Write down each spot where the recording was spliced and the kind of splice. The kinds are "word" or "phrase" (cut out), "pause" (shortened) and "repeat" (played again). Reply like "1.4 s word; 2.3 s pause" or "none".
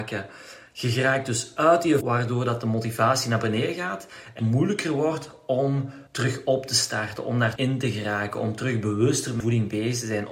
2.0 s word; 4.4 s word; 6.1 s pause; 7.6 s word; 9.4 s word